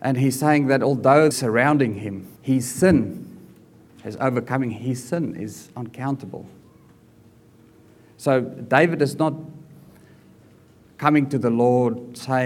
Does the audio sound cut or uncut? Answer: cut